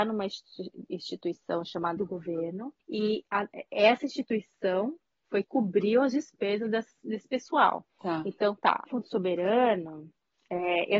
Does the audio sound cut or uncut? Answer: cut